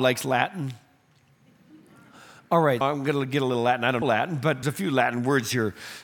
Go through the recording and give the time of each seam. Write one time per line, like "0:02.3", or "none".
0:02.8
0:04.0
0:04.6